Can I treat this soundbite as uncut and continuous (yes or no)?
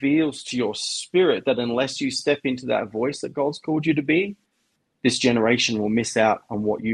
yes